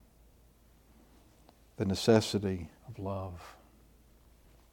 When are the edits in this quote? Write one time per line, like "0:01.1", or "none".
0:02.8